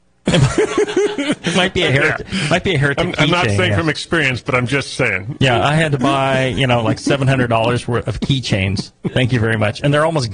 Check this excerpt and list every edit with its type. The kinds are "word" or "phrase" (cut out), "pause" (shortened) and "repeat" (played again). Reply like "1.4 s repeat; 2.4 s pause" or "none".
none